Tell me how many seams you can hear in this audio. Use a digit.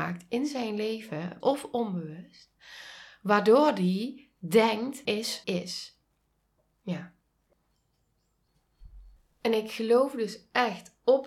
3